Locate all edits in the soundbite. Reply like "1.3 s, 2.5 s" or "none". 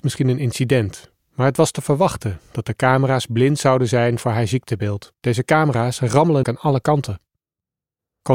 5.2 s, 6.4 s